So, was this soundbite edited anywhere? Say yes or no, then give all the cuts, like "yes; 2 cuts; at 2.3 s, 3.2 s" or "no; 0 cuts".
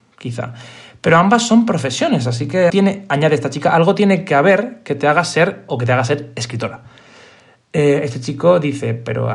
yes; 2 cuts; at 2.7 s, 5.7 s